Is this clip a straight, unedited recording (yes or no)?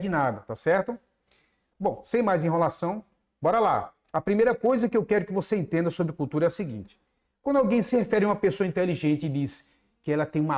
yes